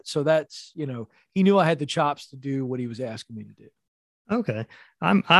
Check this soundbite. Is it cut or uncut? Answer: uncut